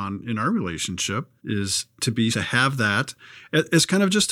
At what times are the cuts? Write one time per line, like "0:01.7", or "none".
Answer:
0:01.4
0:02.3